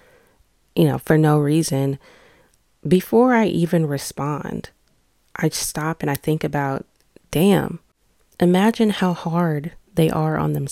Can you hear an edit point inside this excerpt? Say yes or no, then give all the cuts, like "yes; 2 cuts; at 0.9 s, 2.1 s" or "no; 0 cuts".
no; 0 cuts